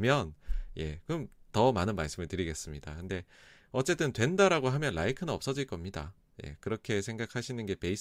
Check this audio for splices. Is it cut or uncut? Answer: uncut